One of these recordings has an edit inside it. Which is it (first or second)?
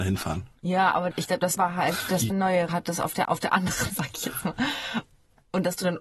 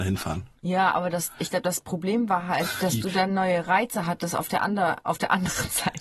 first